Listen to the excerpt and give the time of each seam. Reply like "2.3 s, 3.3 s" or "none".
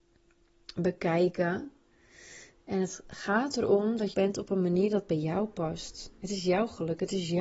4.1 s